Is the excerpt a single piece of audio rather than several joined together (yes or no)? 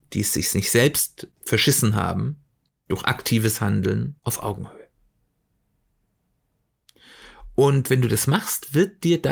no